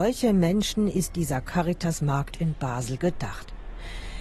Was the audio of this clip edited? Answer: no; 0 cuts

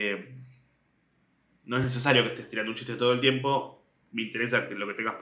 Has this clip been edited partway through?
no; 0 cuts

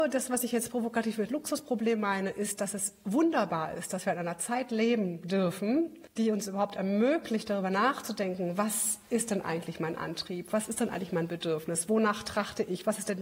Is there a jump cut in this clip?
no; 0 cuts

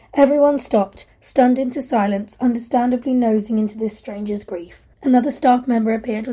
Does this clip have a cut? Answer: yes; 1 cut; at 4.9 s

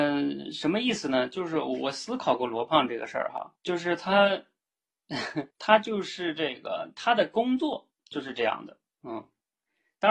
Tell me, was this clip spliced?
yes; 2 cuts; at 3.6 s, 5.5 s

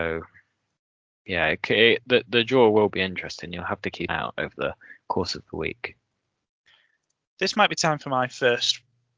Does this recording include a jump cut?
yes; 1 cut; at 4.1 s

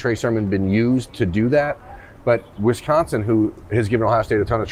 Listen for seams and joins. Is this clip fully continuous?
yes; 0 cuts

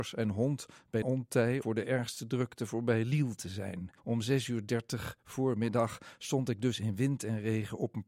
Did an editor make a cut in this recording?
yes; 3 cuts; at 1.0 s, 1.6 s, 4.0 s

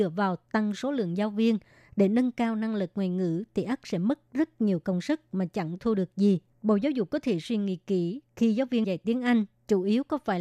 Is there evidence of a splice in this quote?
yes; 2 cuts; at 6.5 s, 8.8 s

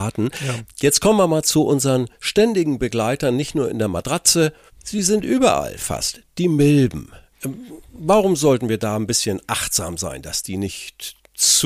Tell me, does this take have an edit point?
no; 0 cuts

